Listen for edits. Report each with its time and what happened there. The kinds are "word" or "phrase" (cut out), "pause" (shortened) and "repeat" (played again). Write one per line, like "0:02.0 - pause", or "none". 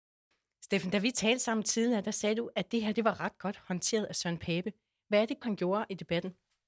0:05.4 - word